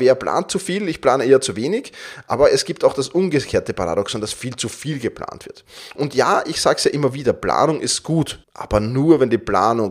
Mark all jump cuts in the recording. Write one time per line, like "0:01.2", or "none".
0:08.4